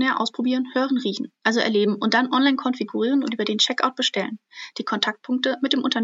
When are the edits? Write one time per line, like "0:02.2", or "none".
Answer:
none